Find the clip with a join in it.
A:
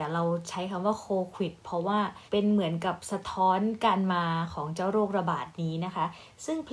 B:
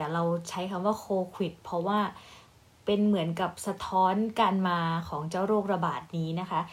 A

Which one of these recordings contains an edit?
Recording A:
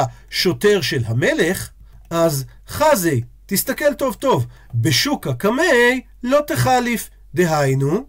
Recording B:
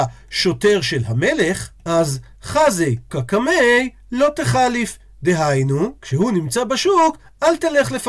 B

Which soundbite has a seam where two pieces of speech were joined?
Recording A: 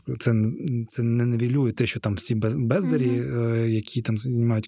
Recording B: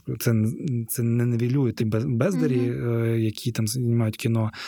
B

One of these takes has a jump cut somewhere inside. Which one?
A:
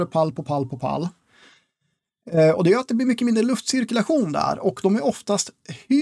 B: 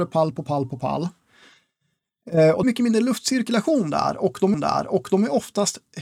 B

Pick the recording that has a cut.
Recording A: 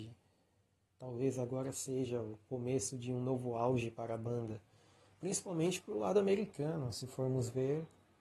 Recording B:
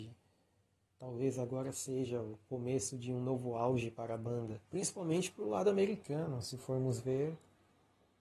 B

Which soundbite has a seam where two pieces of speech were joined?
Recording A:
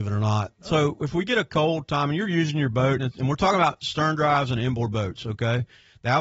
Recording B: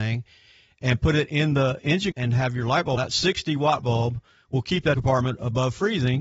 B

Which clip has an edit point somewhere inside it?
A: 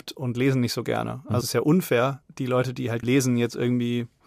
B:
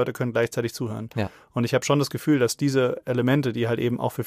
A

